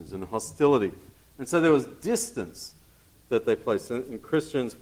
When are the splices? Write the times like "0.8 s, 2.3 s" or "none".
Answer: none